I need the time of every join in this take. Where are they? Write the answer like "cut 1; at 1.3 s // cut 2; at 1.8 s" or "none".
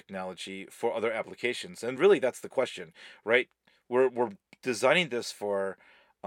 none